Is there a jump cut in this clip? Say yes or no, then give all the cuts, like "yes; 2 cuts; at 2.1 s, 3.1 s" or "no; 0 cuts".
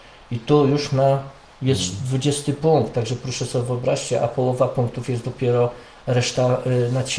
no; 0 cuts